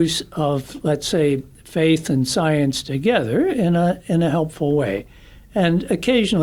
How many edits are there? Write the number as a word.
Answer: zero